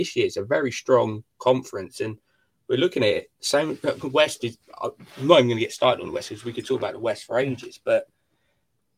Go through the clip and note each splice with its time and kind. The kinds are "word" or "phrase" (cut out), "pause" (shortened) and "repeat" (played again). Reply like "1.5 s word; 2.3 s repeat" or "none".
none